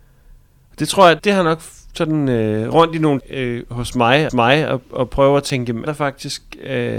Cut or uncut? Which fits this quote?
cut